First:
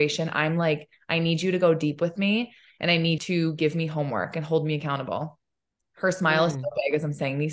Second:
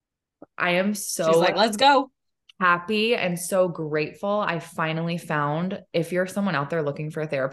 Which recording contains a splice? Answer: first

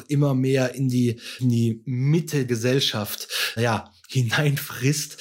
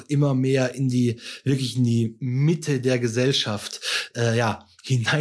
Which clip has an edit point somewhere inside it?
first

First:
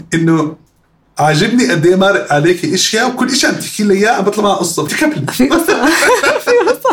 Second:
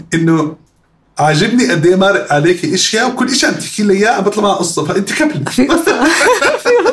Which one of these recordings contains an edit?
first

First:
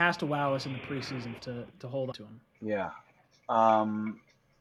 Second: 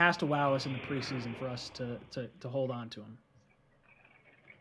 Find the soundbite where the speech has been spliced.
first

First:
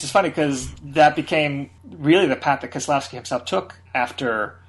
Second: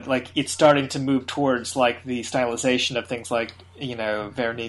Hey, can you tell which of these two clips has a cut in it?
first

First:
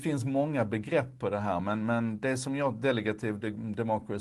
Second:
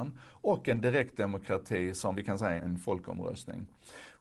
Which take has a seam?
second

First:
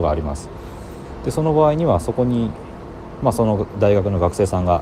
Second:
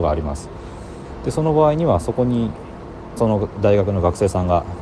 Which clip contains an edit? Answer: second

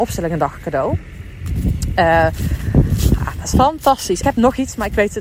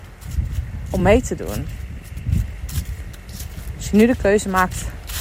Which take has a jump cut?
first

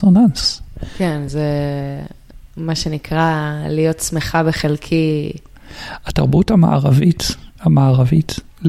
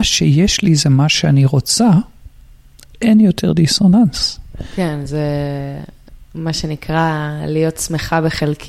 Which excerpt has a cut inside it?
first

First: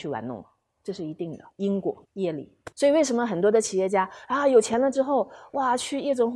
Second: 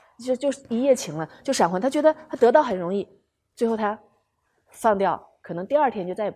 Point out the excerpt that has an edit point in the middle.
first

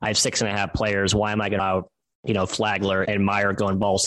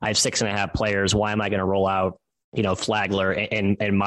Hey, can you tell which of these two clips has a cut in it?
first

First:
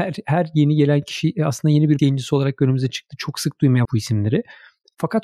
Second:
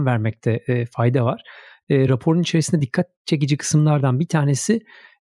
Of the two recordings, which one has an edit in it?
first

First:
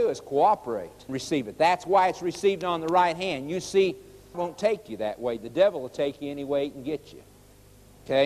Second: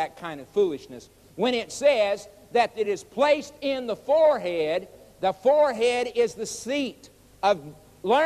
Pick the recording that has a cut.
first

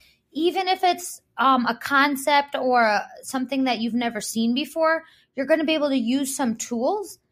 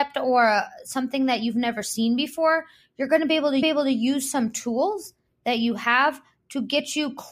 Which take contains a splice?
second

